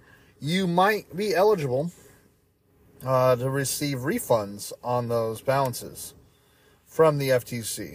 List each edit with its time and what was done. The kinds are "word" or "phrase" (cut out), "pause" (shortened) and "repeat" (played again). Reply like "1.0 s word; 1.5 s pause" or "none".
none